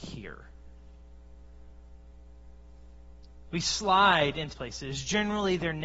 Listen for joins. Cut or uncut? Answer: cut